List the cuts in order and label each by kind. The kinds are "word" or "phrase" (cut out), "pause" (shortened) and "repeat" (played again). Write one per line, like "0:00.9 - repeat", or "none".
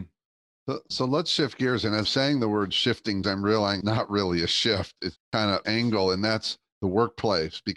0:02.0 - word
0:03.2 - word
0:03.8 - word
0:05.2 - word
0:05.6 - word